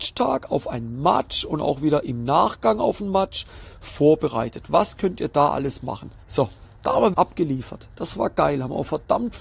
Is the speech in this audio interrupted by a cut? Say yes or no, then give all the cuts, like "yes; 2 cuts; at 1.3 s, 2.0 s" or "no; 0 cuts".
yes; 2 cuts; at 6.2 s, 7.1 s